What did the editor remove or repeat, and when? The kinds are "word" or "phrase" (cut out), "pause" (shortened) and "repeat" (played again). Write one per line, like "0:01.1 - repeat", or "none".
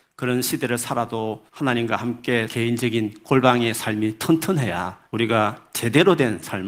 0:01.5 - pause
0:02.5 - word
0:05.1 - pause